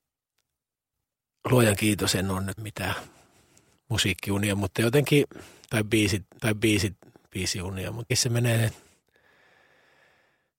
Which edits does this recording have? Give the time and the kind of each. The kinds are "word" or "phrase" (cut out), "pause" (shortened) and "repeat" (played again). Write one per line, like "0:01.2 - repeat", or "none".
0:02.6 - word
0:06.4 - repeat
0:08.1 - word